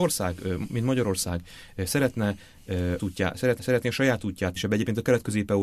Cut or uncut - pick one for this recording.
cut